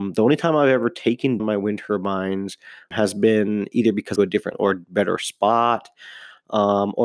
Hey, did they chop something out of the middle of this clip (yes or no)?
yes